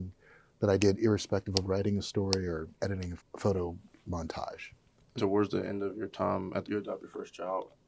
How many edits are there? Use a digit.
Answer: 5